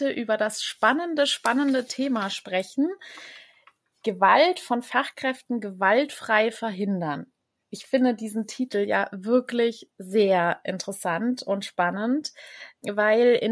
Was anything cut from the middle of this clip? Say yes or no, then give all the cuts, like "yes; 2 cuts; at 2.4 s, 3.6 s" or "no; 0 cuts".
no; 0 cuts